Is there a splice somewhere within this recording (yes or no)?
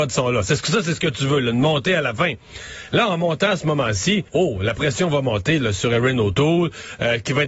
yes